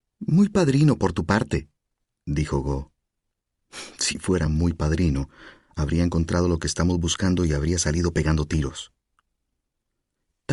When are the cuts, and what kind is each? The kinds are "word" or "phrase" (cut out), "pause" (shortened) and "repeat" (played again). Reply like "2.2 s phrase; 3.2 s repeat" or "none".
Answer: none